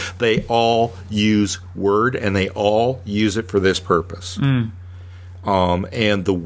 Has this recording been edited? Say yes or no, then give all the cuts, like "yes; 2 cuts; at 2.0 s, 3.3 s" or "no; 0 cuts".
no; 0 cuts